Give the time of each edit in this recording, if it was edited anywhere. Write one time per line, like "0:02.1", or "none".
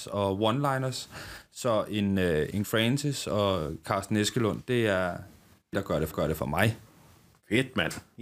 0:02.6
0:05.7
0:06.1